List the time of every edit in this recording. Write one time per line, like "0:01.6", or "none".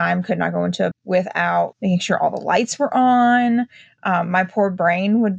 0:00.9
0:01.7